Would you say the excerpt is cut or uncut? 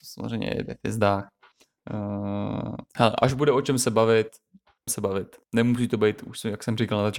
cut